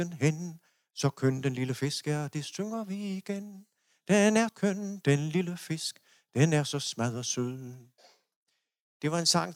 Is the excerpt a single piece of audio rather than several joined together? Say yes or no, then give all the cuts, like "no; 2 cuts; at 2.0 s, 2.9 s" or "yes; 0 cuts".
no; 1 cut; at 4.5 s